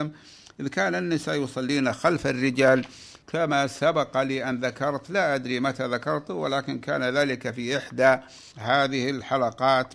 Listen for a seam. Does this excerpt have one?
yes; 2 cuts; at 3.2 s, 8.5 s

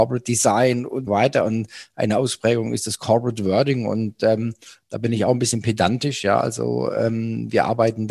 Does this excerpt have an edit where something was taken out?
yes; 1 cut; at 1.1 s

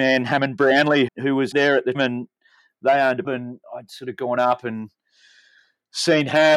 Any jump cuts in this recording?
yes; 4 cuts; at 1.1 s, 1.5 s, 1.9 s, 3.2 s

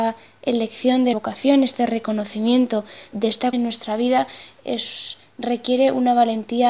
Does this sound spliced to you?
yes; 4 cuts; at 1.1 s, 3.1 s, 3.5 s, 4.6 s

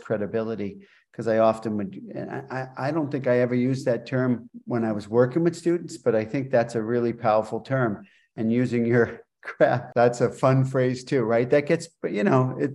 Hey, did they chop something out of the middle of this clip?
no; 0 cuts

